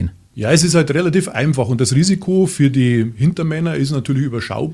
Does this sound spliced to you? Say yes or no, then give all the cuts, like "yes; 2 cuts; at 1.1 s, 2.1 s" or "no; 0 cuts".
no; 0 cuts